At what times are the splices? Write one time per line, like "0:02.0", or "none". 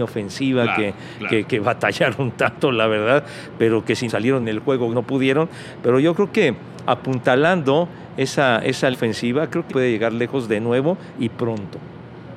0:04.1
0:04.4
0:04.9
0:08.9
0:09.7